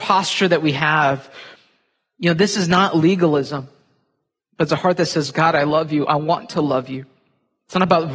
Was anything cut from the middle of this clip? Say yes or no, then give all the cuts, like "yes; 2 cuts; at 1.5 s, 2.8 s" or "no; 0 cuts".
no; 0 cuts